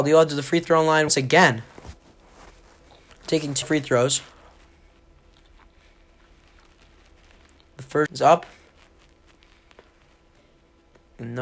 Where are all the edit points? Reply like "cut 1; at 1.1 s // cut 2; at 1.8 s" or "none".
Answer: cut 1; at 1.1 s // cut 2; at 3.6 s // cut 3; at 8.1 s